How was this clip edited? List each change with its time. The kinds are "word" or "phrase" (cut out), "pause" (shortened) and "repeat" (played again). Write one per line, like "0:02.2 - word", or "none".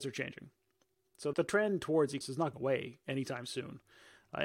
0:01.3 - word
0:02.2 - word
0:02.5 - word